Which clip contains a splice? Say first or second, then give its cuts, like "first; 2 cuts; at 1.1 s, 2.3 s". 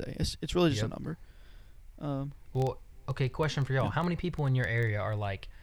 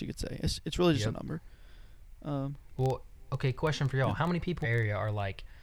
second; 1 cut; at 4.6 s